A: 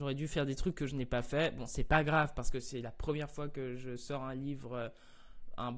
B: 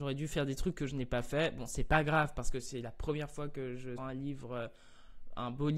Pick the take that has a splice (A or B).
B